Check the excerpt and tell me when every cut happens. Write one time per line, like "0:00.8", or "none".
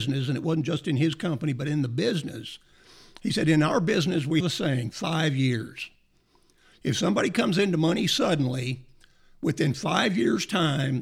0:04.4

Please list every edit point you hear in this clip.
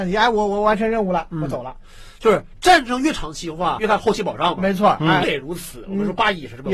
0:03.8
0:05.2

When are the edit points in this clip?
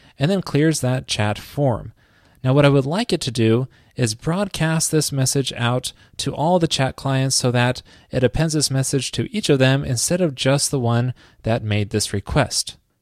none

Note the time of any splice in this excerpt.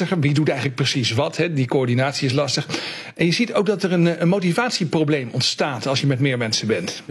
none

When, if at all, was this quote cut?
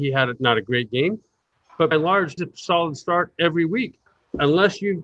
0:01.9
0:02.4
0:04.1

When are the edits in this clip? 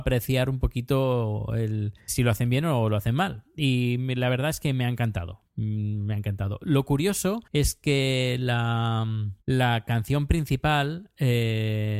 0:02.1
0:07.5
0:09.4

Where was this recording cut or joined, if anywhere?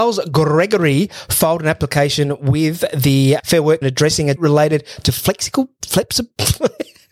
0:03.4
0:03.8
0:04.4

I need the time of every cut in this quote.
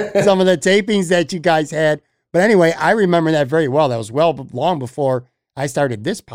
none

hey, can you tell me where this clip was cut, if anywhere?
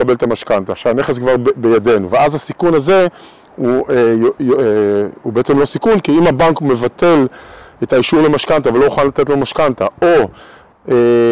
none

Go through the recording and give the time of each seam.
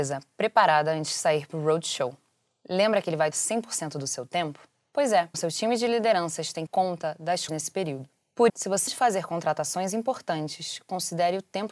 0:03.3
0:05.3
0:06.7
0:07.5
0:08.5
0:08.9

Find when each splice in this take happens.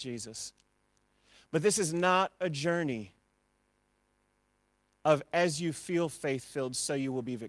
none

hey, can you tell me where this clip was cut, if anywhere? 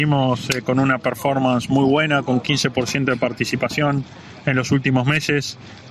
none

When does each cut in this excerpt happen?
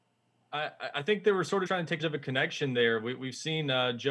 0:01.7
0:02.0

